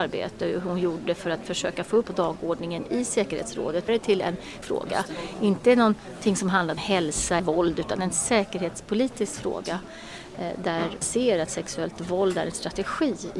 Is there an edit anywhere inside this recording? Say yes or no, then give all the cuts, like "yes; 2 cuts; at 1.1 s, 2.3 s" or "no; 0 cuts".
yes; 6 cuts; at 2.0 s, 3.9 s, 4.6 s, 6.8 s, 7.4 s, 11.0 s